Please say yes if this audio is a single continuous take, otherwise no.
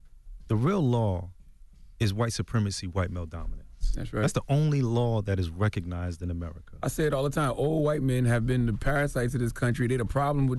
yes